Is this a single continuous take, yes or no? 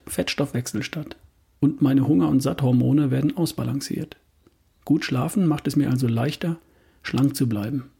yes